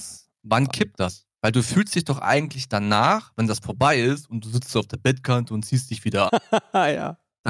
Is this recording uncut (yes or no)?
no